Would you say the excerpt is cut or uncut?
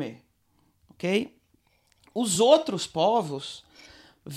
uncut